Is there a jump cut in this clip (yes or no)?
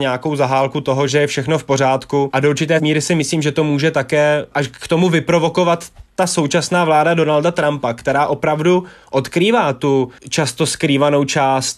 yes